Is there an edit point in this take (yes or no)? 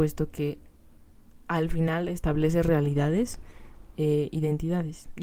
no